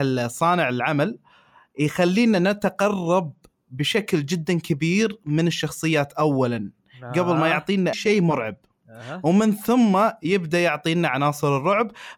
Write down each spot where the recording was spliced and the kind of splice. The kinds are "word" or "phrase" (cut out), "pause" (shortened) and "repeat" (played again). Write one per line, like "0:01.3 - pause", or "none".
0:07.9 - word